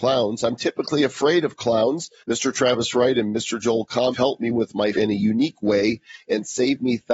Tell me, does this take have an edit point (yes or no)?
yes